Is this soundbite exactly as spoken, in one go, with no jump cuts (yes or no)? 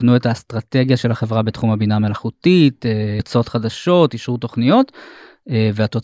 no